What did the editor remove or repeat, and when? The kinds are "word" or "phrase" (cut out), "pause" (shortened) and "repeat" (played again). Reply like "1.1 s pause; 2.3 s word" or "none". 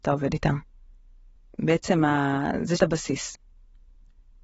2.8 s word

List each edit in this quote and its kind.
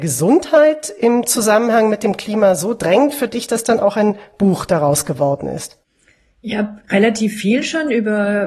none

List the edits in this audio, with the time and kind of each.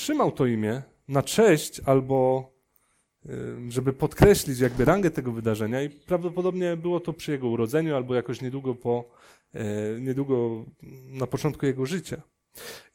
none

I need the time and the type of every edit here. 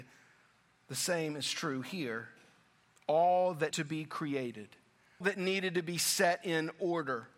3.7 s word; 5.2 s word

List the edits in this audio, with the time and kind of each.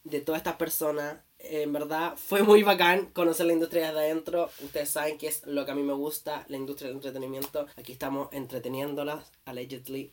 7.7 s pause

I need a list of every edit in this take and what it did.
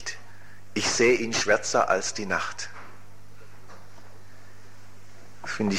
none

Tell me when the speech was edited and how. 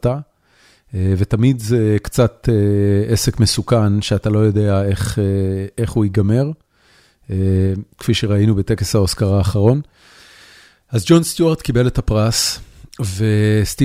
none

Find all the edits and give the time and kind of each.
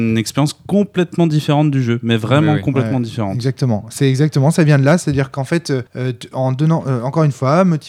5.9 s pause

